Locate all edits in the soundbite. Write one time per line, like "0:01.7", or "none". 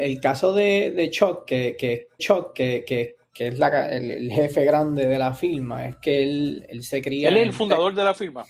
0:02.2